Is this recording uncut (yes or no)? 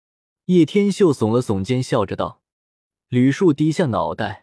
no